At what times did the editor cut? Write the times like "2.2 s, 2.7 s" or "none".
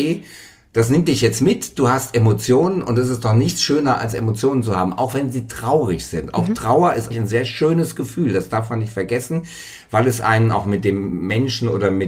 7.1 s